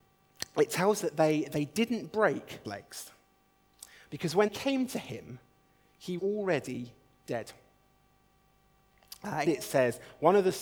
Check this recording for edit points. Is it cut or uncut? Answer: cut